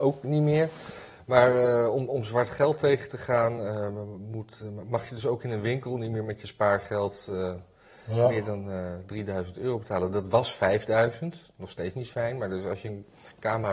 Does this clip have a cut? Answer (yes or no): no